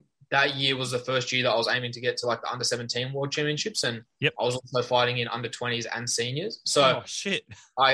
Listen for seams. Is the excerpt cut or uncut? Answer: uncut